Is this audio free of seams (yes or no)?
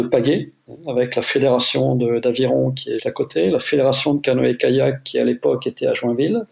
no